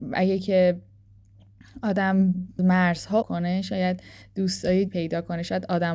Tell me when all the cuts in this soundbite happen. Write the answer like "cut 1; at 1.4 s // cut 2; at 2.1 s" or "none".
cut 1; at 2.6 s // cut 2; at 3.2 s // cut 3; at 4.9 s